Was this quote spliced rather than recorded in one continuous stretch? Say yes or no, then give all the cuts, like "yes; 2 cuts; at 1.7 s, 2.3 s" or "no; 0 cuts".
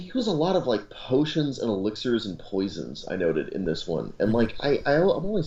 no; 0 cuts